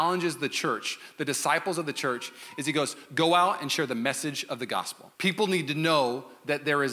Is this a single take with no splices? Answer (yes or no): no